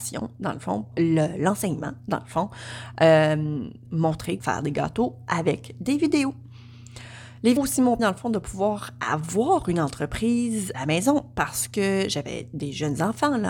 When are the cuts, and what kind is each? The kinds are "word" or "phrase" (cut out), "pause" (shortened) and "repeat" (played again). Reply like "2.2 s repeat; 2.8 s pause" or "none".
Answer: 0.9 s word; 3.9 s word; 4.4 s word; 7.6 s word; 8.0 s word; 10.7 s word

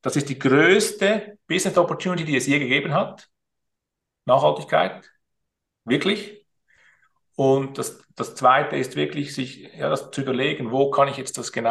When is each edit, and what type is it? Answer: none

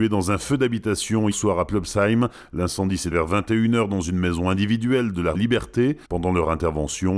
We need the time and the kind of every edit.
1.3 s word; 3.1 s word; 5.3 s phrase; 6.0 s pause

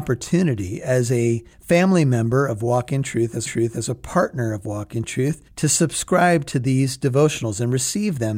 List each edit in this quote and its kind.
1.5 s pause; 3.5 s repeat; 5.5 s pause

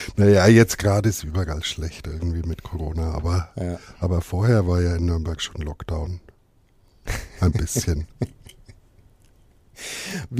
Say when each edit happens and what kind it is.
none

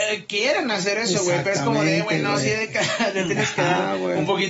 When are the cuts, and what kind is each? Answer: none

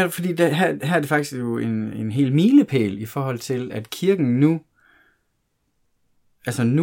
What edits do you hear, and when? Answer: none

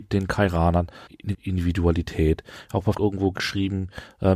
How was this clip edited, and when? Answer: 1.3 s word; 2.9 s word

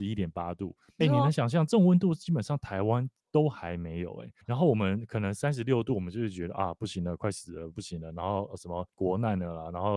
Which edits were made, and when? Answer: 1.0 s word; 4.4 s pause; 8.9 s pause

